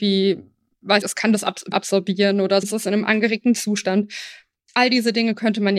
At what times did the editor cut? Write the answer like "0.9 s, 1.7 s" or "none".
1.0 s, 1.7 s, 2.6 s